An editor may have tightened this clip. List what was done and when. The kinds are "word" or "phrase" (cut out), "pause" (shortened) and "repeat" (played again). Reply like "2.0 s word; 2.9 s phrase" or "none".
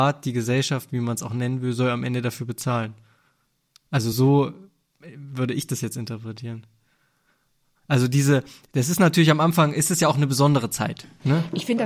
none